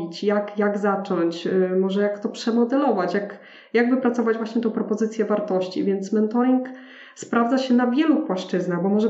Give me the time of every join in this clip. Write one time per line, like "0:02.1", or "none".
none